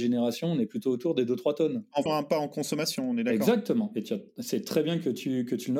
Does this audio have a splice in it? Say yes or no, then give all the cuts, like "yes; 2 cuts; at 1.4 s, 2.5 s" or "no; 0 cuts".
yes; 1 cut; at 2.1 s